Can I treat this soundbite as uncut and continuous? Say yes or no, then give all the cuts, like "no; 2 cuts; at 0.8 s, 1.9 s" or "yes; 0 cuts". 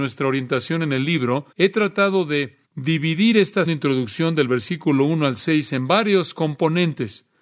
no; 3 cuts; at 1.5 s, 2.7 s, 3.7 s